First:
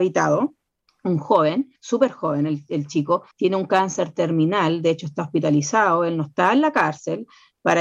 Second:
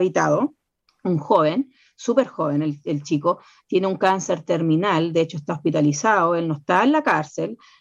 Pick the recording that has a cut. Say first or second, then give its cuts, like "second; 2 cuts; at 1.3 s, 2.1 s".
first; 2 cuts; at 1.8 s, 3.3 s